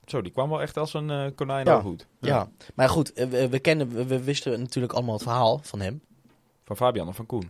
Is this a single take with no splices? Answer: no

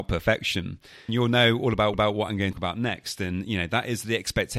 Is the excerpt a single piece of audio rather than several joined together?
no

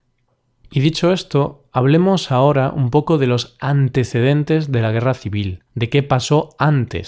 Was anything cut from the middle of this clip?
yes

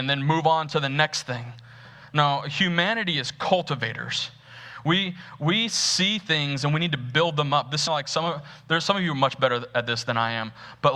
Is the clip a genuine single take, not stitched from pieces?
no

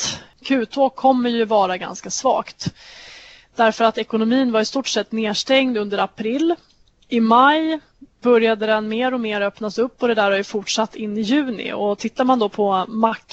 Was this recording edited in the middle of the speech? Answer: no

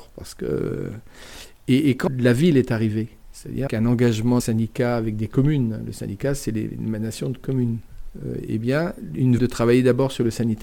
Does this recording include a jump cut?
yes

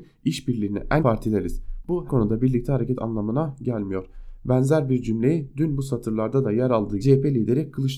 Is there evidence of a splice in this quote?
yes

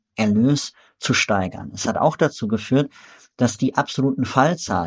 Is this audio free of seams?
yes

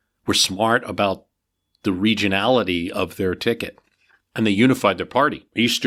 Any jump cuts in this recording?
no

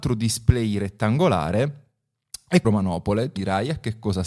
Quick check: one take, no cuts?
no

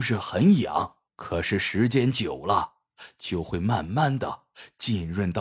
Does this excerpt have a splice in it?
yes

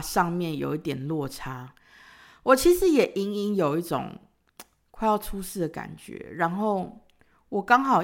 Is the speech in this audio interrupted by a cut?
no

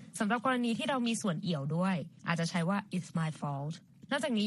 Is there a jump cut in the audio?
no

